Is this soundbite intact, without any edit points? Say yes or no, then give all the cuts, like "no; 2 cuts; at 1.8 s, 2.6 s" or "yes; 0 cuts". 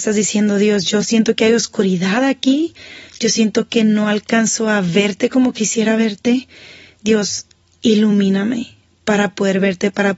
yes; 0 cuts